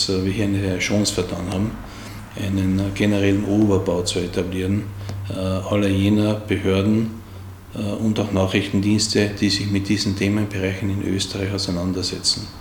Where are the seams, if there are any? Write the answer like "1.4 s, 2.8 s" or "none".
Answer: none